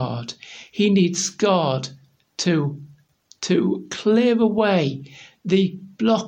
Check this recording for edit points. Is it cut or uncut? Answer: uncut